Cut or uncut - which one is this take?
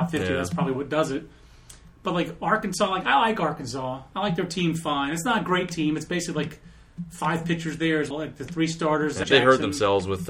cut